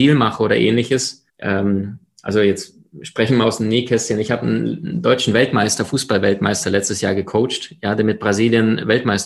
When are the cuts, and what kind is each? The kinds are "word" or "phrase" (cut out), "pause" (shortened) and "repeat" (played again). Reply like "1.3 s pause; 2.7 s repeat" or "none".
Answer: 1.3 s pause

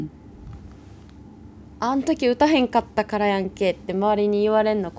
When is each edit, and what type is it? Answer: none

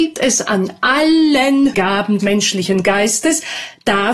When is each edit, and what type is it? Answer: 1.7 s word; 2.2 s word

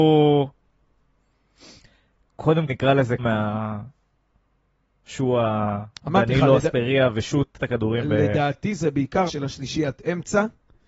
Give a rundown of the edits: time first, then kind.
2.7 s word; 3.2 s phrase; 5.9 s pause; 7.6 s word; 9.3 s word

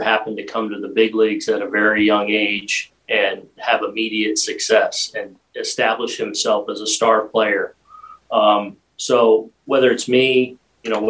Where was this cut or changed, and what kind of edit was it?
3.0 s pause

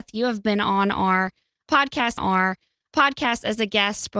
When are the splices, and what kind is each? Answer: 2.2 s repeat

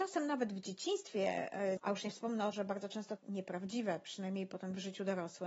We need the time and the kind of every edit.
1.8 s phrase; 2.5 s word; 3.2 s phrase

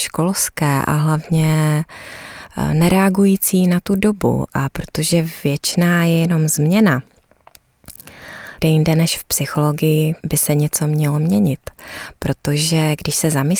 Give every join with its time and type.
8.6 s phrase; 10.2 s pause

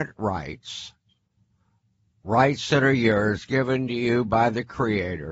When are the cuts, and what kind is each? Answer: none

